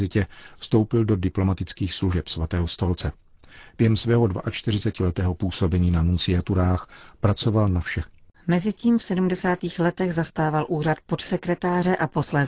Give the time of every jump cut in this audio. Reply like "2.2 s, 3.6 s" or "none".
8.1 s